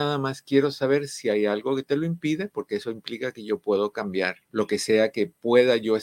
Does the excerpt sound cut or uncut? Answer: cut